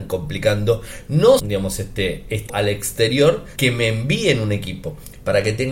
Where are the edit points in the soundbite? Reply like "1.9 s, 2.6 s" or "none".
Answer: 1.4 s, 2.5 s, 3.6 s